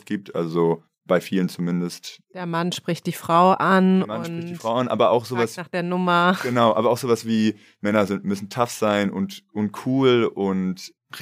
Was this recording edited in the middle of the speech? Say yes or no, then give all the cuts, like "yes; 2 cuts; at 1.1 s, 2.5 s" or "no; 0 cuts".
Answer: no; 0 cuts